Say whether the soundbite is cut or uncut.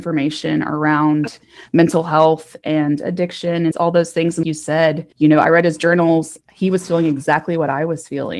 cut